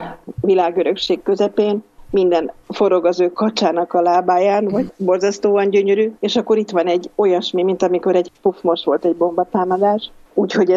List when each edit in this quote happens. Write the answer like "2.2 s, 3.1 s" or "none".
6.2 s

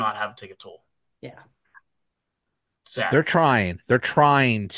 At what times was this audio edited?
none

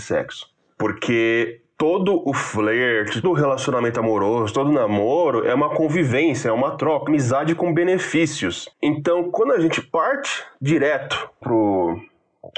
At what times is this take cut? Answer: 3.2 s, 7.1 s, 8.7 s, 11.4 s

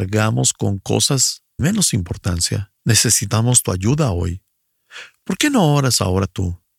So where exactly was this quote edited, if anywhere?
1.6 s, 2.8 s

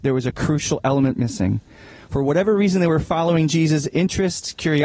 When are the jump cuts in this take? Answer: none

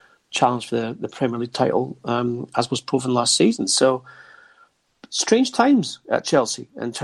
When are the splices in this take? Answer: none

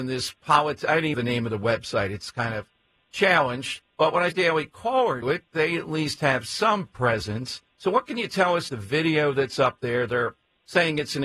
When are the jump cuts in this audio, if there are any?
1.1 s, 3.9 s, 4.3 s, 5.2 s, 7.7 s, 8.7 s

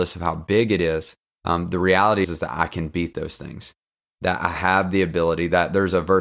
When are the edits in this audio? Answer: 2.2 s

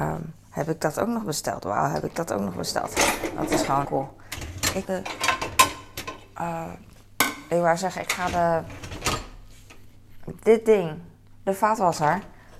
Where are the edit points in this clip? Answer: 3.8 s, 4.8 s

